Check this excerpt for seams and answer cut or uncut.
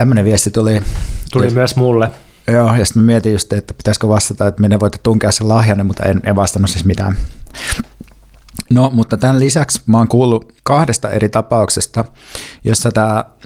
cut